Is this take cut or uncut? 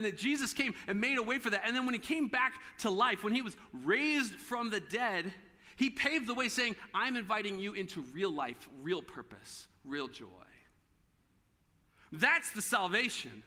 uncut